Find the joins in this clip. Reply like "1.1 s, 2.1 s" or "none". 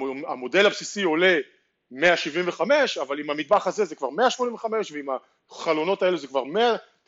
none

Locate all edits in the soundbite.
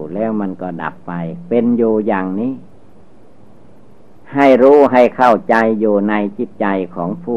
none

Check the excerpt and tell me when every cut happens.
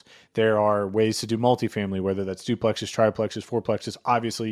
none

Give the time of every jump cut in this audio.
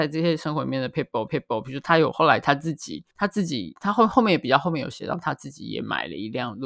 1.3 s, 3.1 s

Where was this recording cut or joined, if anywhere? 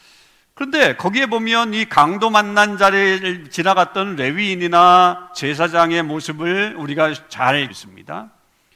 7.7 s

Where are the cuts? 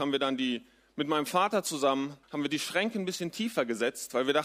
2.2 s

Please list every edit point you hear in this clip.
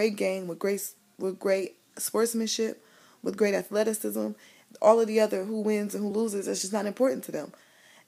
none

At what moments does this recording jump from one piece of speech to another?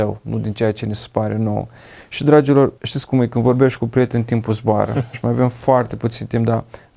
2.8 s

